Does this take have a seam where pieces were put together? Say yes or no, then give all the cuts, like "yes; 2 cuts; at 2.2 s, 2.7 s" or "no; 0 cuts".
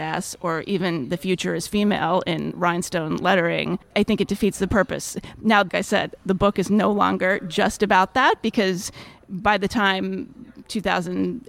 yes; 1 cut; at 5.7 s